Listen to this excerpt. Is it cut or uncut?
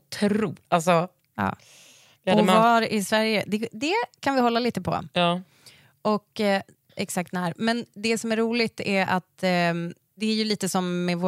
uncut